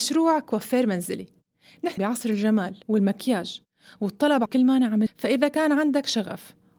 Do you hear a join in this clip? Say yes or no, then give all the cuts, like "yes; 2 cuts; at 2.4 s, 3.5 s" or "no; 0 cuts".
yes; 4 cuts; at 2.0 s, 2.8 s, 4.5 s, 5.1 s